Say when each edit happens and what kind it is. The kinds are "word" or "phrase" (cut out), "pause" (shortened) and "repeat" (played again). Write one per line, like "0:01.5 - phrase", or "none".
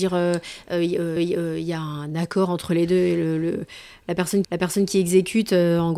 0:01.2 - repeat
0:04.4 - repeat